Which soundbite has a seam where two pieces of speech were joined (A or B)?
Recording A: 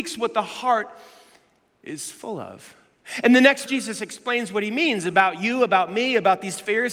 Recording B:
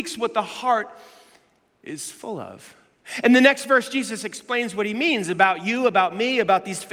A